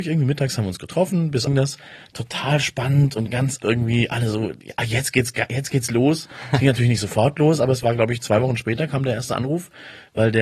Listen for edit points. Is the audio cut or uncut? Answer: cut